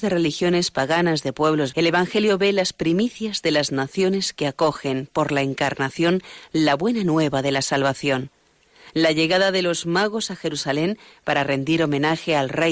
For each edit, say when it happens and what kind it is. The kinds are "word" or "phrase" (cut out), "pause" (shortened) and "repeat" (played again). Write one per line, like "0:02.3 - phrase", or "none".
0:01.7 - word